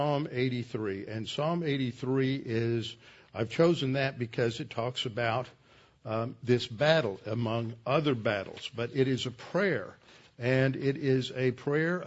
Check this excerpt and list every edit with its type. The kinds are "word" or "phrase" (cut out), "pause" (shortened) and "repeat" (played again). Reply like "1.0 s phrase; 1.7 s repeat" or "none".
none

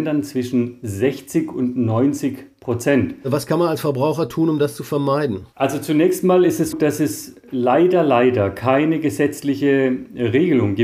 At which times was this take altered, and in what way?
6.7 s word

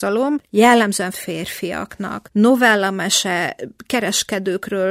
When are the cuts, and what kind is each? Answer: 1.1 s word

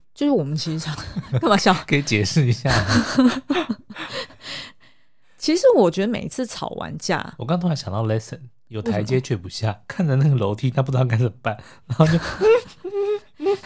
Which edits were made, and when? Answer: none

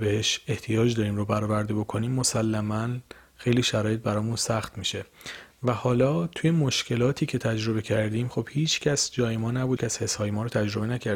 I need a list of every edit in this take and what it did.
9.8 s word

